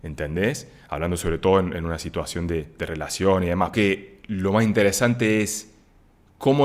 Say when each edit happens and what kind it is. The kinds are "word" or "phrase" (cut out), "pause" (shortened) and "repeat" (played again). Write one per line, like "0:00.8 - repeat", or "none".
0:03.7 - phrase